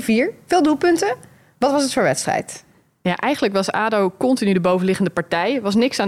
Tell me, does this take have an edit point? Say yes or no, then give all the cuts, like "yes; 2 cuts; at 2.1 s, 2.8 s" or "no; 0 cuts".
no; 0 cuts